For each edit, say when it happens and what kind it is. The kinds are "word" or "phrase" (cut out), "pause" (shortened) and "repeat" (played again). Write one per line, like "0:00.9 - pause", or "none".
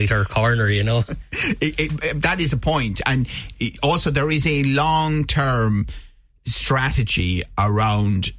none